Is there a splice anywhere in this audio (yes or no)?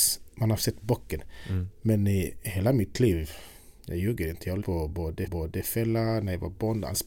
yes